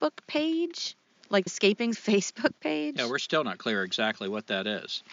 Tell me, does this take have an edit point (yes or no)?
yes